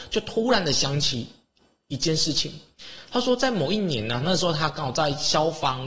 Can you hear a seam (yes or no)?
no